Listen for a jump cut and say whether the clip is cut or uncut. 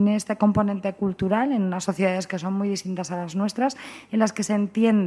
uncut